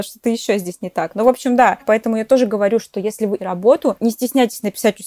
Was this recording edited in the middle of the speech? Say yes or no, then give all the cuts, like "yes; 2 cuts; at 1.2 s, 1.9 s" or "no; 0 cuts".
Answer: yes; 2 cuts; at 1.8 s, 3.4 s